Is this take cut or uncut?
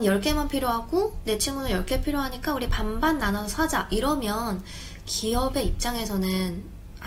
uncut